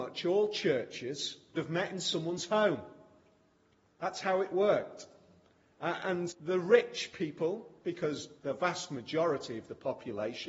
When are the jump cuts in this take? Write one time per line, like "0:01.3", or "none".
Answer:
0:01.5
0:06.3
0:08.4